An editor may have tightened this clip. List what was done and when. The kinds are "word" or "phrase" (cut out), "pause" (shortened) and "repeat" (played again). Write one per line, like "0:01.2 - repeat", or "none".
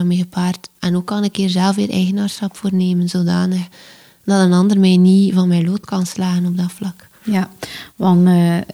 none